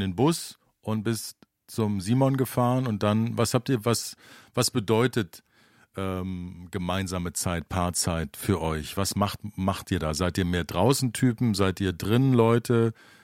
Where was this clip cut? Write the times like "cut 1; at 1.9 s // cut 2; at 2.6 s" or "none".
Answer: none

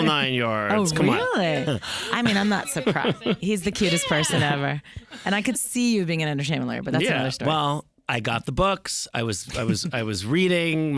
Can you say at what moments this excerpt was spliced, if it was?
cut 1; at 5.5 s

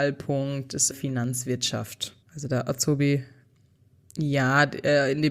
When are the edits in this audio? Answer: cut 1; at 0.9 s // cut 2; at 2.2 s

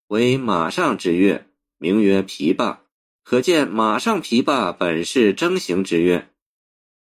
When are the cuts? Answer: cut 1; at 3.0 s

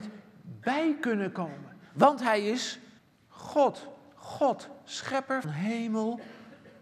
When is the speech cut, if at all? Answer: cut 1; at 3.0 s // cut 2; at 5.4 s

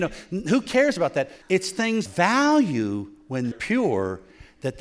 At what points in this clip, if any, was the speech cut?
cut 1; at 1.4 s // cut 2; at 2.1 s // cut 3; at 3.5 s

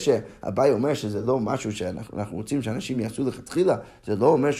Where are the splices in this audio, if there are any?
none

